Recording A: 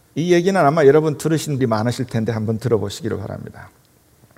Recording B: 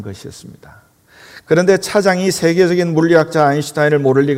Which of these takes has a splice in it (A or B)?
A